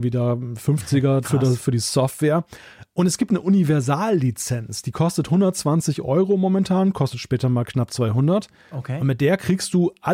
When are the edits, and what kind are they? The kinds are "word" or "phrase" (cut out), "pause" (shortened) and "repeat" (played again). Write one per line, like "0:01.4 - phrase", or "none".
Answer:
0:01.2 - word